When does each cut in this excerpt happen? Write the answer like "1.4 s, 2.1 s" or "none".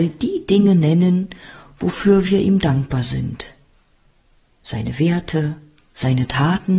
none